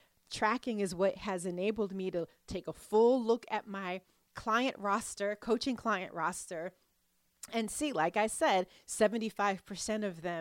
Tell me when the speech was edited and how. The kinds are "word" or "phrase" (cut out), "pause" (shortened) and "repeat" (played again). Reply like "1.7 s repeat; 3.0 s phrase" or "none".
none